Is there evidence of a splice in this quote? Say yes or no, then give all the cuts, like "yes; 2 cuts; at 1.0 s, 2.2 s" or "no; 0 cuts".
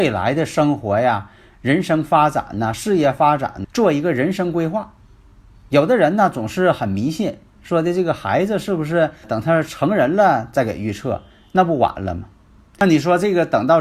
yes; 2 cuts; at 3.6 s, 9.2 s